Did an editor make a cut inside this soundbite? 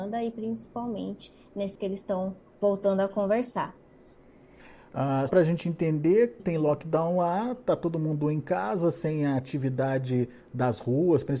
yes; 3 cuts; at 1.8 s, 5.3 s, 6.4 s

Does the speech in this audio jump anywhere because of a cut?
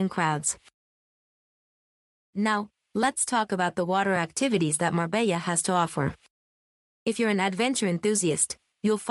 no; 0 cuts

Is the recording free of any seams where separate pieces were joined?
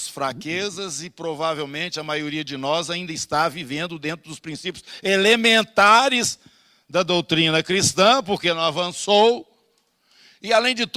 yes; 0 cuts

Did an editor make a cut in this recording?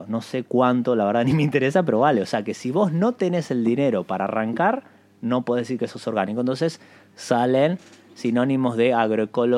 no; 0 cuts

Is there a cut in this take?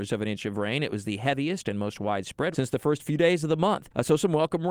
yes; 1 cut; at 2.5 s

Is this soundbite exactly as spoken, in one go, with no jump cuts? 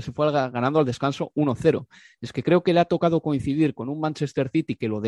yes; 0 cuts

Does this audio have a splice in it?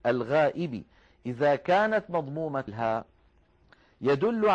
no; 0 cuts

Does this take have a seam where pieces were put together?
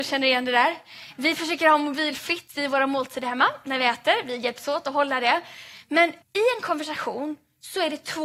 yes; 1 cut; at 6.2 s

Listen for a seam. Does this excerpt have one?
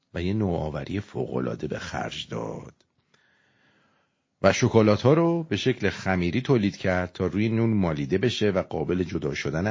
no; 0 cuts

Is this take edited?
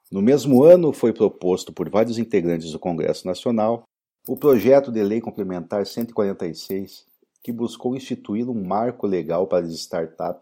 no; 0 cuts

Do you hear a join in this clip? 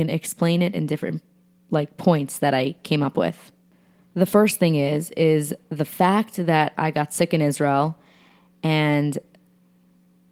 no; 0 cuts

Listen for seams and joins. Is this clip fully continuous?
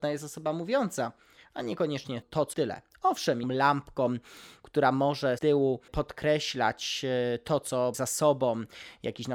no; 6 cuts; at 2.2 s, 2.5 s, 3.4 s, 5.4 s, 5.9 s, 7.9 s

